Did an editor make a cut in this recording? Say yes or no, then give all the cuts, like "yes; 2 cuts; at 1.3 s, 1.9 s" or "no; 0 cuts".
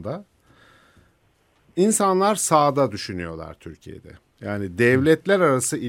no; 0 cuts